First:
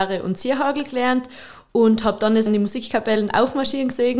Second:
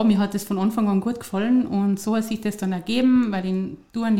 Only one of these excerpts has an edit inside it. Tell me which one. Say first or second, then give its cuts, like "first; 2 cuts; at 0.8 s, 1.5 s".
first; 1 cut; at 2.5 s